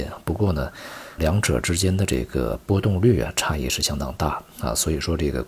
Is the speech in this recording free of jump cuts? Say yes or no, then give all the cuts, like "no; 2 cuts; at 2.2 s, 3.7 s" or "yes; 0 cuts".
no; 1 cut; at 1.2 s